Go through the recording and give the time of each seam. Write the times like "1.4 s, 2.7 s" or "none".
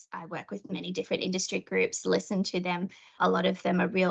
none